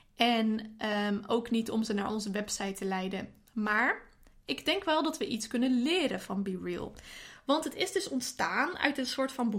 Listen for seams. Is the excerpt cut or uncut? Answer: uncut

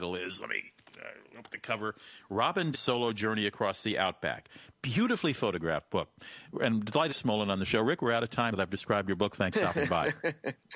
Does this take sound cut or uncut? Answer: cut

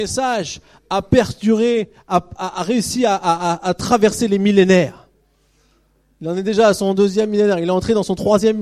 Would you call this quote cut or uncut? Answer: uncut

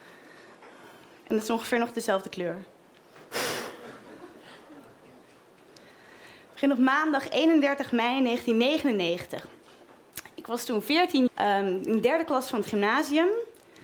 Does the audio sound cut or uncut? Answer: cut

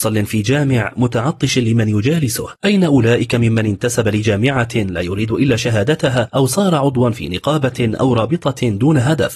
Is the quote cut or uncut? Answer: uncut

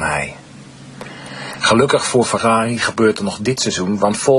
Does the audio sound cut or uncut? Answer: uncut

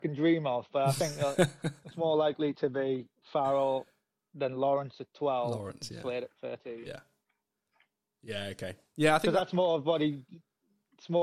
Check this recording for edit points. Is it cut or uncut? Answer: uncut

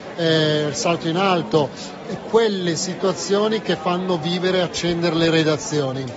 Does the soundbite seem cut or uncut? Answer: cut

